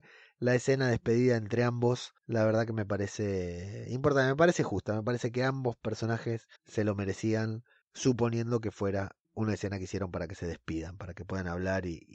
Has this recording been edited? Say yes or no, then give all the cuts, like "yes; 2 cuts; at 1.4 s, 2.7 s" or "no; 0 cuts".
yes; 4 cuts; at 2.2 s, 6.6 s, 7.8 s, 9.2 s